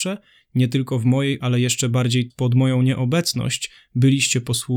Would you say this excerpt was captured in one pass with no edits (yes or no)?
no